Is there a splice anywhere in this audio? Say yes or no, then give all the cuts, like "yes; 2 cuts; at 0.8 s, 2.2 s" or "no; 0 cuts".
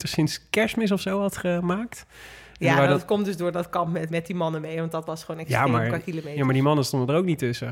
yes; 1 cut; at 4.1 s